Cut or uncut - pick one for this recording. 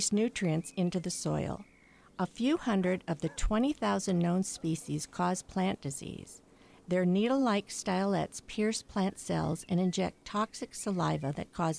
uncut